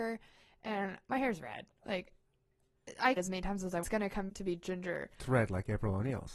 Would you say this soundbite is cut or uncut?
cut